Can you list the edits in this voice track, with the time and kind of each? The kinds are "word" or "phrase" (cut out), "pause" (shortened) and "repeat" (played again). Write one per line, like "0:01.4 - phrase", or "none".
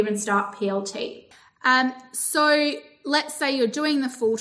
none